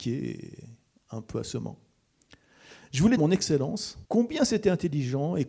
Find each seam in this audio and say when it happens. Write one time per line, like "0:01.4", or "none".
0:03.2
0:04.0